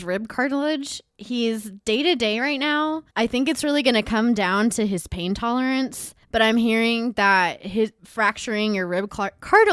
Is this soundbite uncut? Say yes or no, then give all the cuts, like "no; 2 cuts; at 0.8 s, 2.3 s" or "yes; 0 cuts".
no; 3 cuts; at 3.1 s, 6.2 s, 8.0 s